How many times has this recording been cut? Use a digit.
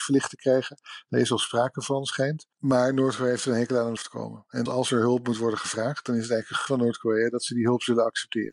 3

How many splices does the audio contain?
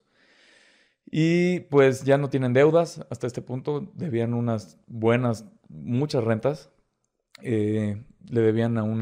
0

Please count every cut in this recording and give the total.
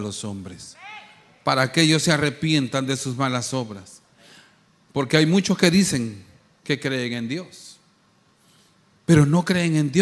0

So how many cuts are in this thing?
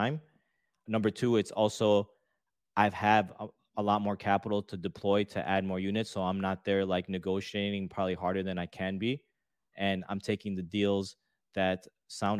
0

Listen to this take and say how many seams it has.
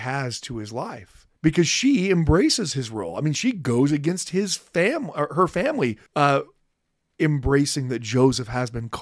2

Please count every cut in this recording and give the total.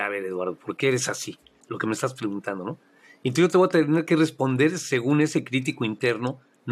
0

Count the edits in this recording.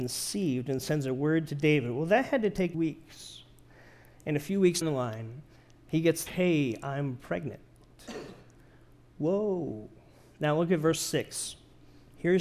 3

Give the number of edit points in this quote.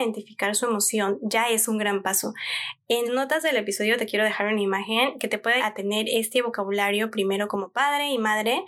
2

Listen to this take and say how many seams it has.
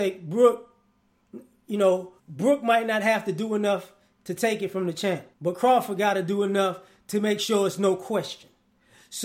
2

